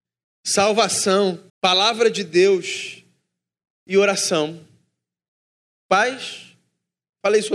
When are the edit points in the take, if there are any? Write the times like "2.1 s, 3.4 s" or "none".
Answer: 1.5 s